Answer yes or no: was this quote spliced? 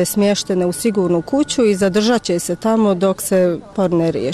no